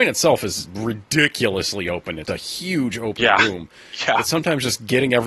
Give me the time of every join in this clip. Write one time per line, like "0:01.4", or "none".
0:02.3

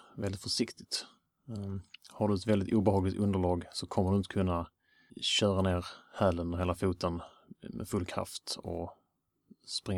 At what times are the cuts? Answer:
0:05.1

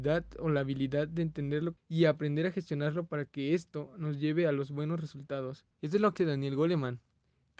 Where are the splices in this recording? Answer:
0:01.8
0:05.7
0:06.2

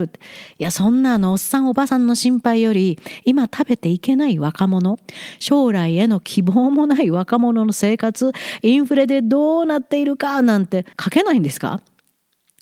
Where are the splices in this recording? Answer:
0:10.9

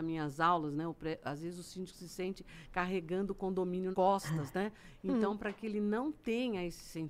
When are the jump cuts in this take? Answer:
0:03.9

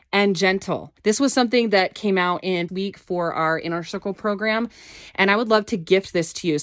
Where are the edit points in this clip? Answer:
0:01.0
0:02.7

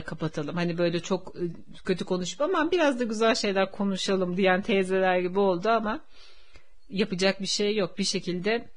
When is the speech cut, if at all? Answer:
0:01.8

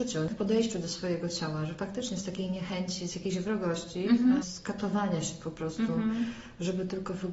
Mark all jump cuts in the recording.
none

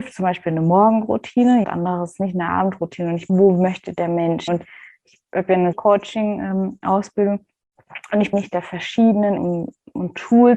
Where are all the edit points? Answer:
0:01.6
0:03.3
0:04.5
0:05.7
0:08.3
0:09.4

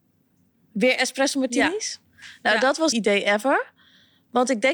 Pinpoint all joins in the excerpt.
0:02.9

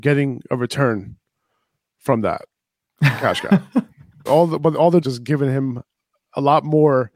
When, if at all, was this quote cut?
0:04.3
0:05.0

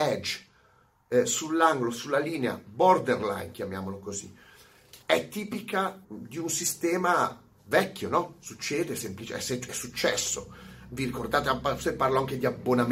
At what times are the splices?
0:05.0
0:06.0
0:07.6

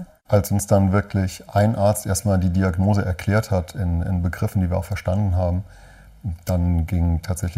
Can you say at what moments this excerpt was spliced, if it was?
none

